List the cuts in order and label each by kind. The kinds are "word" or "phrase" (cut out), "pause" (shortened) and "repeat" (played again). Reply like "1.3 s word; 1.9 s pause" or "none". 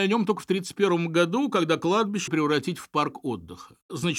2.3 s word

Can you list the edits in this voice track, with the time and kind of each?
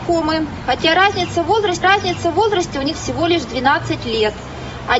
1.8 s repeat; 2.9 s word

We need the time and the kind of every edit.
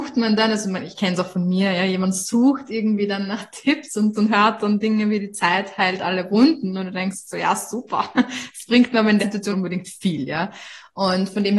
4.1 s word; 9.2 s word; 9.5 s phrase

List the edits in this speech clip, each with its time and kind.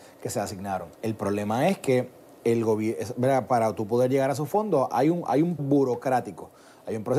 0.9 s pause; 5.6 s word

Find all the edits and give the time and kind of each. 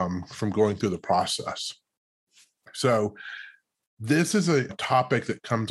4.7 s word

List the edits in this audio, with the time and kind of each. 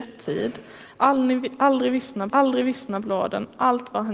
2.3 s repeat

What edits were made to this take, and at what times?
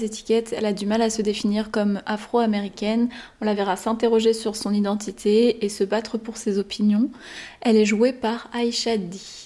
none

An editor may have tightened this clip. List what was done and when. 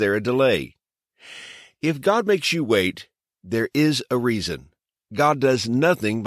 none

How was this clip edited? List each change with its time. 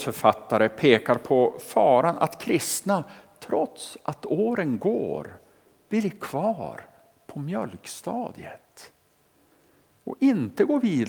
none

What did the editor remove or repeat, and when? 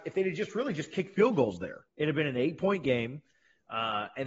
1.9 s pause

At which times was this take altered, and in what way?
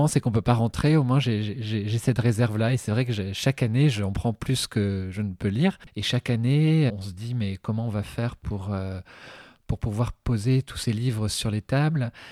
6.9 s word

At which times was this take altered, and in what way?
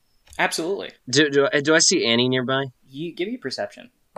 1.0 s pause; 2.8 s pause

